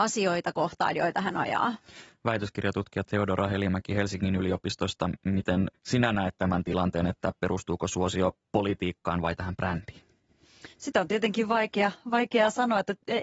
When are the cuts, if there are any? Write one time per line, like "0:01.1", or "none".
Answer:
0:05.7
0:10.7